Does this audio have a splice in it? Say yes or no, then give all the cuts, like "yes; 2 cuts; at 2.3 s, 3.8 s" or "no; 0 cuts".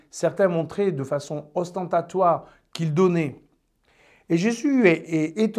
no; 0 cuts